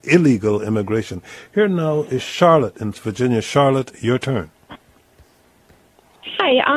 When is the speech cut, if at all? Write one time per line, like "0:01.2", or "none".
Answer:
0:02.9

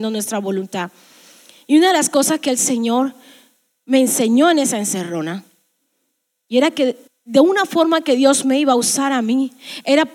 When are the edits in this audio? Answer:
0:07.1

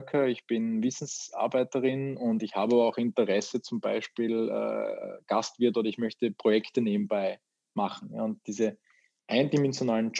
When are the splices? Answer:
none

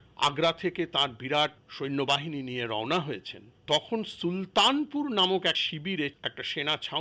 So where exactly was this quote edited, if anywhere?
0:05.5

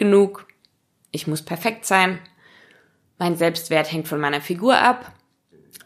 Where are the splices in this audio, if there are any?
none

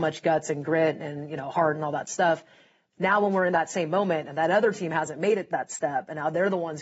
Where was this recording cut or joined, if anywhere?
none

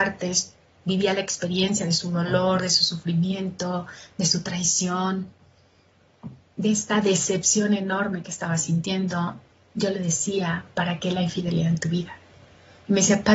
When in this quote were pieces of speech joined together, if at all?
none

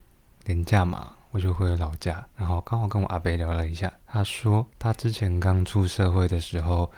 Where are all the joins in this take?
0:02.3
0:04.0
0:04.7

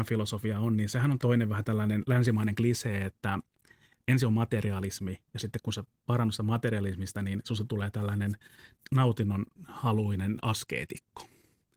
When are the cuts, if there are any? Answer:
none

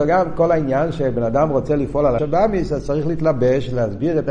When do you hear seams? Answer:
0:02.2

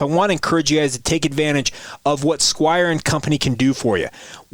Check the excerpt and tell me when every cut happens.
none

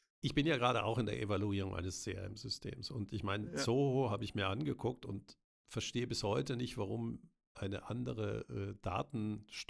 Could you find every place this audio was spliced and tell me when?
0:05.4

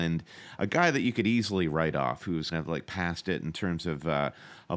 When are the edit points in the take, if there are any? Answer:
0:02.5

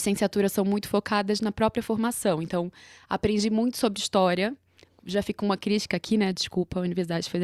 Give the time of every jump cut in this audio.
none

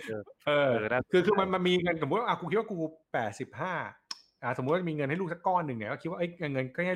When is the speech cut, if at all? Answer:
0:03.0

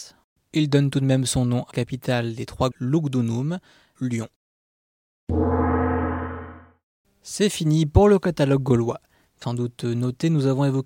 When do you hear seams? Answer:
0:01.7
0:02.7
0:03.9
0:09.4

